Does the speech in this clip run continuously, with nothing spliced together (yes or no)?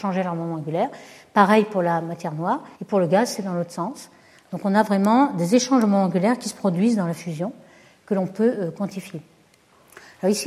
no